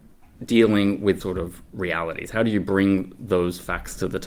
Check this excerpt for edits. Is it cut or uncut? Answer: cut